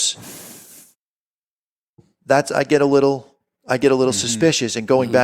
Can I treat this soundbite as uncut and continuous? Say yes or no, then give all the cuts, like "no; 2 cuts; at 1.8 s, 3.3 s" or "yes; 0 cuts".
yes; 0 cuts